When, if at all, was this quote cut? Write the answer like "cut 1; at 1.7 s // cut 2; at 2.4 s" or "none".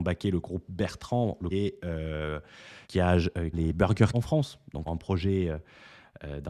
cut 1; at 1.5 s // cut 2; at 2.8 s // cut 3; at 3.5 s // cut 4; at 4.1 s // cut 5; at 4.9 s

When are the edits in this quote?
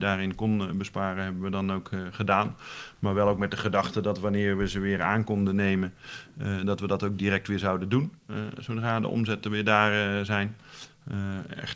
none

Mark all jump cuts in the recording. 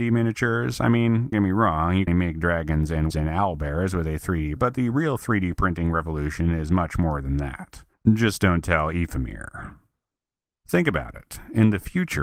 cut 1; at 1.3 s // cut 2; at 2.1 s // cut 3; at 3.1 s // cut 4; at 4.6 s // cut 5; at 7.9 s

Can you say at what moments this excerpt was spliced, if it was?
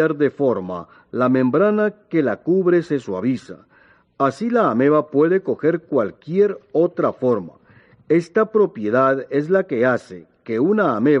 none

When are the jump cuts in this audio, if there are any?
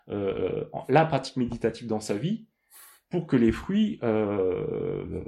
none

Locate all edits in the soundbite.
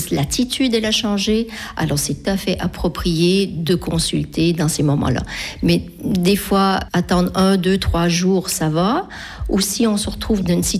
cut 1; at 2.2 s

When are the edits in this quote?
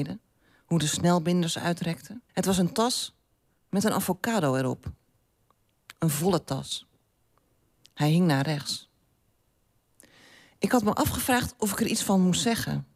cut 1; at 2.3 s

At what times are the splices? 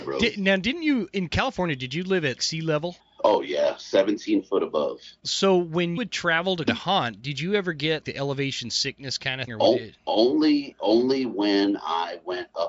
cut 1; at 2.4 s // cut 2; at 3.0 s // cut 3; at 6.0 s // cut 4; at 6.7 s // cut 5; at 8.0 s // cut 6; at 9.5 s // cut 7; at 10.0 s

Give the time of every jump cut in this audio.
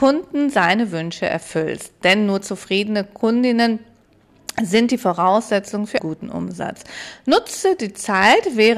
cut 1; at 6.0 s

